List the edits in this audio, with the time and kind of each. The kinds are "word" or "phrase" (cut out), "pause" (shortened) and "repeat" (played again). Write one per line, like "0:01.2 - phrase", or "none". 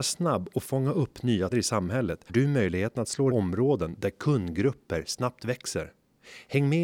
0:01.5 - word
0:02.3 - word
0:03.3 - phrase